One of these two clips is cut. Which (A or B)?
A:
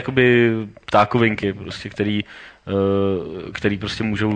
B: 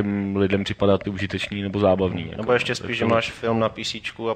B